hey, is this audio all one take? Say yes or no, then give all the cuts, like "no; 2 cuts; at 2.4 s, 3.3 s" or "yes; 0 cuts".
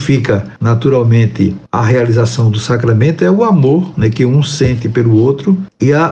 yes; 0 cuts